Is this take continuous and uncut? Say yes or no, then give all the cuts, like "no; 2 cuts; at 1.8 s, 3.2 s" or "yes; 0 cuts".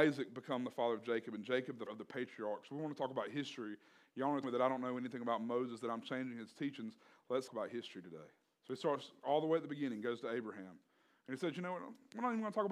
no; 4 cuts; at 1.9 s, 4.4 s, 7.5 s, 8.4 s